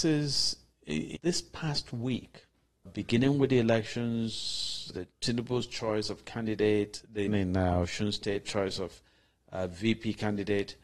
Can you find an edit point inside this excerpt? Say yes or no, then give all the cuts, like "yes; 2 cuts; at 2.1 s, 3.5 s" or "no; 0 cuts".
yes; 5 cuts; at 1.2 s, 2.9 s, 4.9 s, 7.3 s, 8.4 s